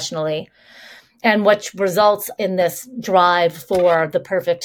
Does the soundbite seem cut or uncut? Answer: cut